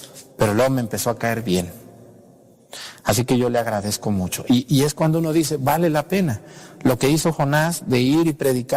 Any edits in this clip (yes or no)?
no